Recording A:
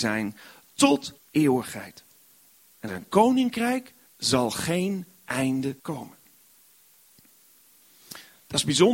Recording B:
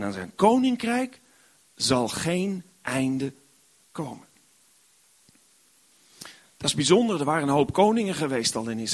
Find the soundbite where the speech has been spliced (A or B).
A